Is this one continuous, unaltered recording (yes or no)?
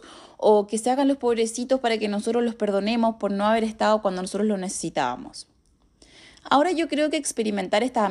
yes